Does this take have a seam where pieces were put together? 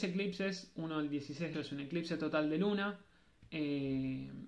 yes; 1 cut; at 1.5 s

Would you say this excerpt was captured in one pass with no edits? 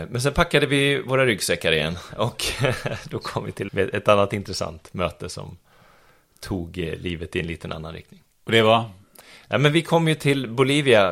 no; 1 cut; at 3.7 s

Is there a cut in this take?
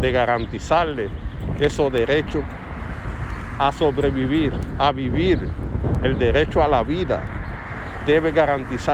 no; 0 cuts

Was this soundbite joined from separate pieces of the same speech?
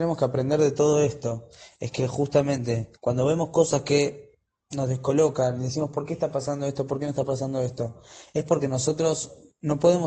yes; 1 cut; at 3.0 s

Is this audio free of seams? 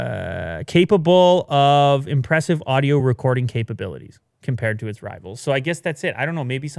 yes; 0 cuts

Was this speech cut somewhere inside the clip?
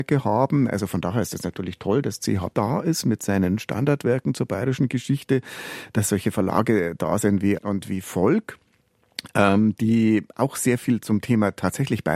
yes; 2 cuts; at 2.5 s, 7.6 s

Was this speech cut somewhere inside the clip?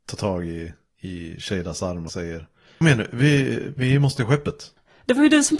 yes; 3 cuts; at 2.1 s, 2.8 s, 4.2 s

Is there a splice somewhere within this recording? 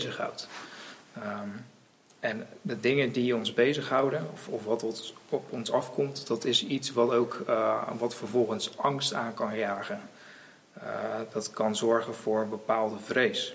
no; 0 cuts

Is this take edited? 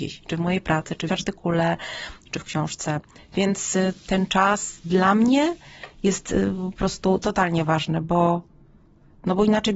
yes; 1 cut; at 1.1 s

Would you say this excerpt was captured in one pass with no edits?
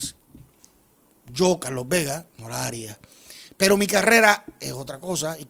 yes; 0 cuts

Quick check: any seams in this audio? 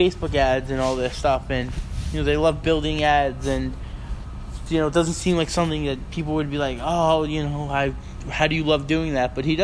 yes; 1 cut; at 4.7 s

